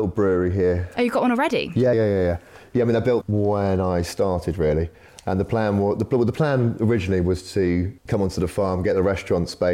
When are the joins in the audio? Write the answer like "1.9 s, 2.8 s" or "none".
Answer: 1.9 s, 3.2 s, 8.0 s